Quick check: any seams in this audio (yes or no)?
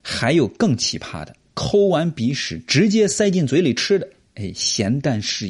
no